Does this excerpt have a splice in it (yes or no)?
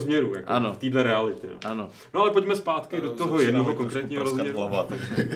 no